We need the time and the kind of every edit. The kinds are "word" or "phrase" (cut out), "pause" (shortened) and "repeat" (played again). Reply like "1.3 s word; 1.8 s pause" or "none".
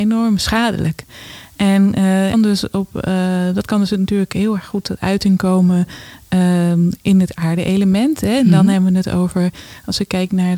2.3 s phrase